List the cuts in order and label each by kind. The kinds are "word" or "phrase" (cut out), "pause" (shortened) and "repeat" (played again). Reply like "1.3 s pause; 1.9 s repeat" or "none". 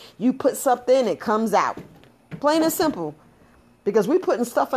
none

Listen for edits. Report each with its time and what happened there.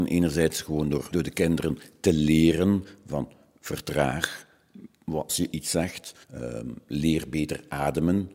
1.1 s word; 5.3 s word; 6.2 s pause

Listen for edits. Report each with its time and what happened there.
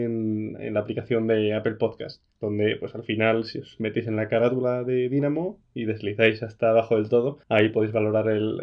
2.3 s pause; 7.4 s pause

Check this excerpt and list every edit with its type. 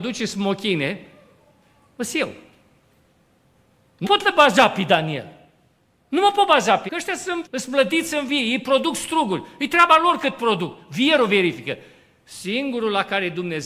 4.0 s word; 6.9 s word; 7.4 s word

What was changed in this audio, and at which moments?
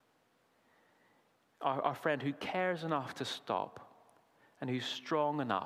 none

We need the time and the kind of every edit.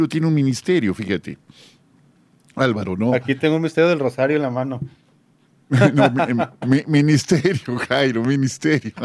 none

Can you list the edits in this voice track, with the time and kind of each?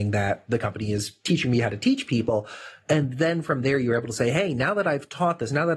none

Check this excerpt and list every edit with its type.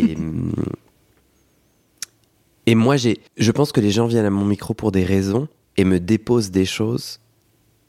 0.9 s pause; 3.3 s pause; 5.6 s pause

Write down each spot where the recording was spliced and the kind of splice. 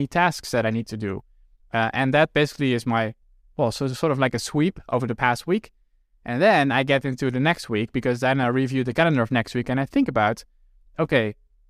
none

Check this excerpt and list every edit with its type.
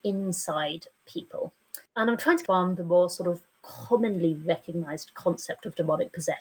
1.9 s pause; 2.5 s phrase

